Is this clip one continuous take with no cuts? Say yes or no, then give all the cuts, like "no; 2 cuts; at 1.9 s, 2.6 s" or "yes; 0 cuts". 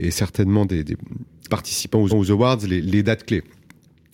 no; 2 cuts; at 1.5 s, 2.1 s